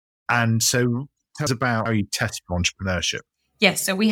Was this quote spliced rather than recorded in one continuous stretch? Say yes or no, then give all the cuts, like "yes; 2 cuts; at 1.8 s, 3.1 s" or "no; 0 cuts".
yes; 2 cuts; at 1.5 s, 1.9 s